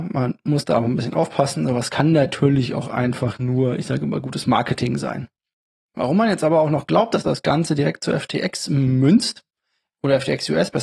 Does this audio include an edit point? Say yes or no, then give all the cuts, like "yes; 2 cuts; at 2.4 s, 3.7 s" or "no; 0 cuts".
no; 0 cuts